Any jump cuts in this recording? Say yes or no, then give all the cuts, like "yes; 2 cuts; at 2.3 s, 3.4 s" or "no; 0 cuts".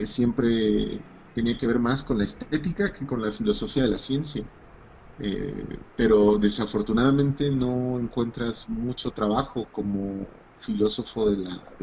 yes; 1 cut; at 1.3 s